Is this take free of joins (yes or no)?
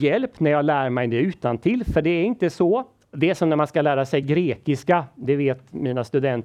yes